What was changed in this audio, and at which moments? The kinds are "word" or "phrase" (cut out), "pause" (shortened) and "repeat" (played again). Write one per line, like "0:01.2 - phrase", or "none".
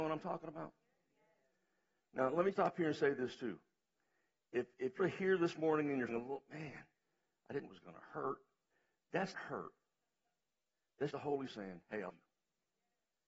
0:02.5 - word
0:05.0 - word
0:06.1 - word
0:07.6 - word
0:09.3 - word
0:11.1 - word
0:11.5 - word
0:12.1 - word